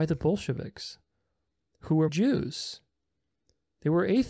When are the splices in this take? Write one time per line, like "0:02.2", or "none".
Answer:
0:02.1